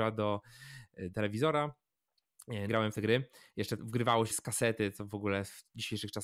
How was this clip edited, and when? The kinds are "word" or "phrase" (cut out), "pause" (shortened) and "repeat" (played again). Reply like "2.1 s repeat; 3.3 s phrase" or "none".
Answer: 1.1 s word; 2.7 s phrase; 3.8 s word; 4.3 s word